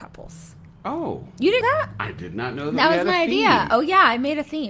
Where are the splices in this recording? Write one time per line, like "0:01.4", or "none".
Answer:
0:01.6